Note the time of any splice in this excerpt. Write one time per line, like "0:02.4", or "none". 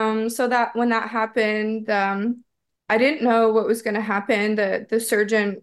none